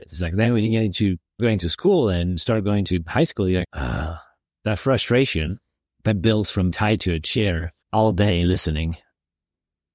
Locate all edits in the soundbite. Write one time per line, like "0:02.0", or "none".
0:01.4
0:03.6
0:05.8
0:06.7
0:07.8